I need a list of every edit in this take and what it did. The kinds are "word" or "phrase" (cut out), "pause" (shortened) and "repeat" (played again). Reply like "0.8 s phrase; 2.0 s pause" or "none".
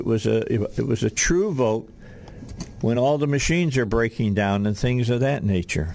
none

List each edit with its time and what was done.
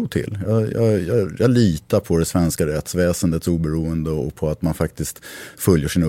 none

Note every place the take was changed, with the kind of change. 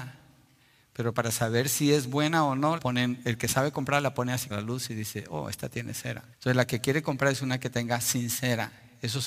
2.8 s word; 4.5 s word; 6.3 s pause

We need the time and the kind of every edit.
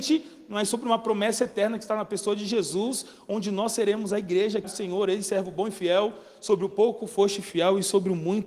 4.6 s word

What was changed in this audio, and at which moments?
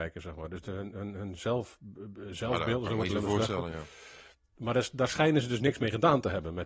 none

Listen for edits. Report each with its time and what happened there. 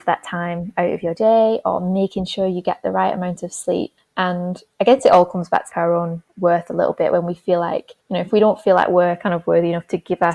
5.7 s phrase; 8.0 s pause

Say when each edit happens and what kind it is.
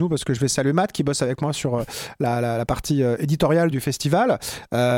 3.7 s word

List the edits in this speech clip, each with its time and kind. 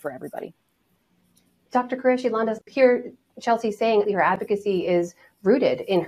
2.7 s word; 4.1 s word

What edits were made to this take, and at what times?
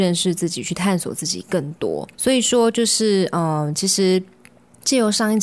2.1 s pause

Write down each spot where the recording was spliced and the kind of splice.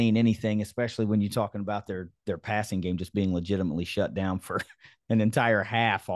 none

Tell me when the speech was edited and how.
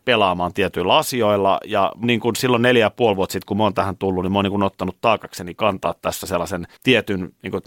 2.0 s word; 6.8 s pause

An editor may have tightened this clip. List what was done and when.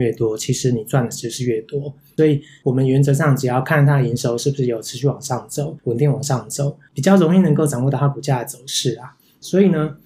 none

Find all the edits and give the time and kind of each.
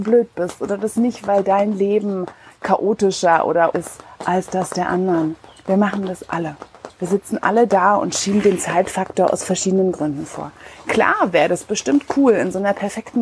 3.7 s word

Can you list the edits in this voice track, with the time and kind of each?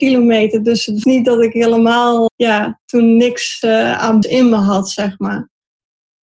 1.0 s word; 2.3 s word; 3.6 s word; 4.2 s word

